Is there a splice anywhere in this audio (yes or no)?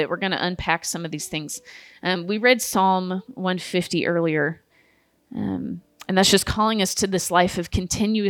no